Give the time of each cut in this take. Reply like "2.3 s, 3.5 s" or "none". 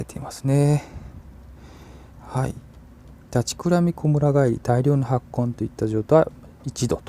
2.1 s